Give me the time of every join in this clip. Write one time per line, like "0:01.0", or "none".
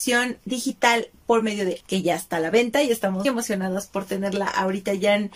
0:01.8
0:03.2

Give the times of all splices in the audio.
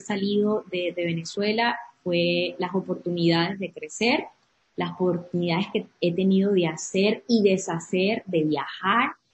none

